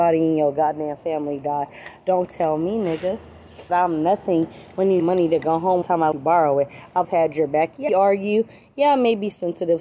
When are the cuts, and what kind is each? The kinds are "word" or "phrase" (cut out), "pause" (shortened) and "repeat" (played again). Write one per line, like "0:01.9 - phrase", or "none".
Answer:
0:03.7 - word
0:05.0 - word
0:05.8 - word
0:06.1 - word
0:07.0 - word
0:07.9 - word